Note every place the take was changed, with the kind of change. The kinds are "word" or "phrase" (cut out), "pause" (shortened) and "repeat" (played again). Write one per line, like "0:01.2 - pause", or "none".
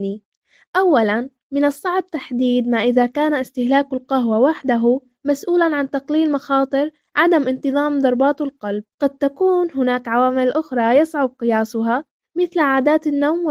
0:08.9 - pause